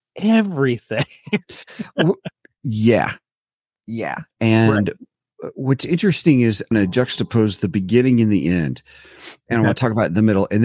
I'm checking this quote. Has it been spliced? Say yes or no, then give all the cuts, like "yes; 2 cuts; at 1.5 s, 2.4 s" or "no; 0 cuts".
yes; 2 cuts; at 4.3 s, 6.7 s